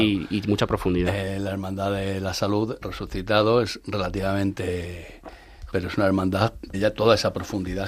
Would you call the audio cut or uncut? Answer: cut